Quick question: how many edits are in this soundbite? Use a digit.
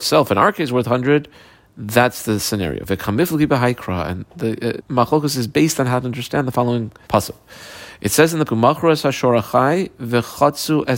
3